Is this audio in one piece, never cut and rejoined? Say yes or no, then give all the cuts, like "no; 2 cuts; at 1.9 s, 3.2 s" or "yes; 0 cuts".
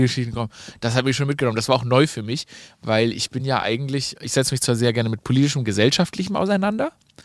yes; 0 cuts